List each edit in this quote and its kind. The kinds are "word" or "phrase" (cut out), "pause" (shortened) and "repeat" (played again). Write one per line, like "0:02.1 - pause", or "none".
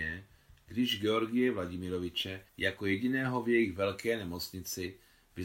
0:02.5 - pause